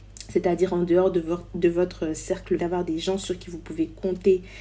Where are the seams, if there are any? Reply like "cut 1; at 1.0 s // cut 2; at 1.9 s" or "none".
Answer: cut 1; at 2.6 s